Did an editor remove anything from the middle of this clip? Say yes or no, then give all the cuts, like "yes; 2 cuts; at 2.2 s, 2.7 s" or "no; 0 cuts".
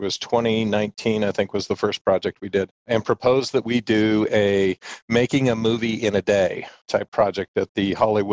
no; 0 cuts